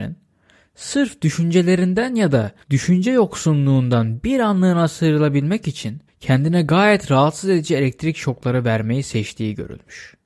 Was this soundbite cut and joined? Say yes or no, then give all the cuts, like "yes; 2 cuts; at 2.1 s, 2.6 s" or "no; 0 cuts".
yes; 2 cuts; at 2.6 s, 6.1 s